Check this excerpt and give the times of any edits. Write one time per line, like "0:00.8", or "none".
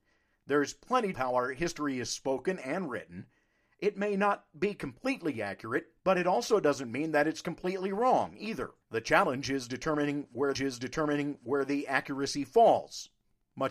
0:01.1
0:06.0
0:08.8
0:10.5